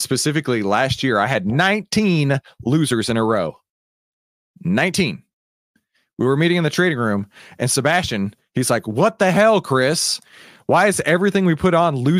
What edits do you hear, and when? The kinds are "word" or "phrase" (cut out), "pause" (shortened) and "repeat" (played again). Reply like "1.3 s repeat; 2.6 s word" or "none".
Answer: none